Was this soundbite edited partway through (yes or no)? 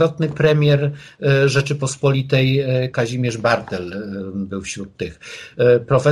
yes